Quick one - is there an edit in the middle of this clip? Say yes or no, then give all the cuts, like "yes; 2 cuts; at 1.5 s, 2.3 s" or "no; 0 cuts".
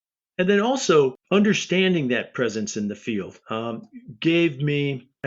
yes; 2 cuts; at 1.2 s, 3.4 s